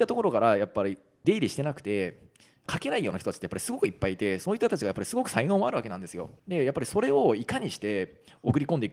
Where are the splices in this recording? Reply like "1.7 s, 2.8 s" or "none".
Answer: 6.4 s